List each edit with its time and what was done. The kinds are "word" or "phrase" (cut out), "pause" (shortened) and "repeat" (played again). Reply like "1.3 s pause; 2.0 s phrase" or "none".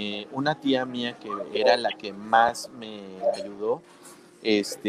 none